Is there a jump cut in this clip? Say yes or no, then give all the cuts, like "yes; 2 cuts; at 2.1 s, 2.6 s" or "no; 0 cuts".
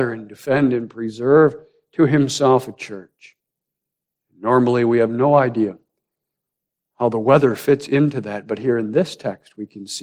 no; 0 cuts